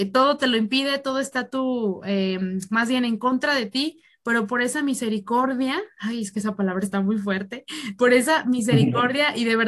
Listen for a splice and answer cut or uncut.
uncut